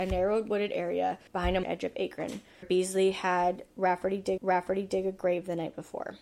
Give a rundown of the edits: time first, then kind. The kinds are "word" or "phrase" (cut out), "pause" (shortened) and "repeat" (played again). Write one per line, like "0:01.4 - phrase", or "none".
0:01.3 - pause
0:01.6 - phrase
0:02.6 - word
0:04.4 - repeat